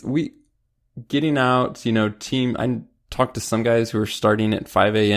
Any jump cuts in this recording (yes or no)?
no